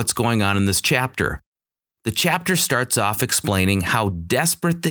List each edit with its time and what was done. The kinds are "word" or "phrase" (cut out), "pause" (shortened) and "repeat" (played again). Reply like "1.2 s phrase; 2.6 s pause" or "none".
none